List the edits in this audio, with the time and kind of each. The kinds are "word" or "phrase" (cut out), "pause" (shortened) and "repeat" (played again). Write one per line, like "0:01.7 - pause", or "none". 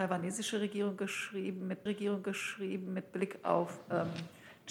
0:01.9 - repeat